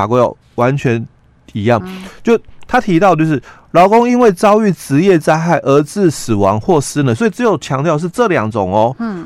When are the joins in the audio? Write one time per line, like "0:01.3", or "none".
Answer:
0:01.8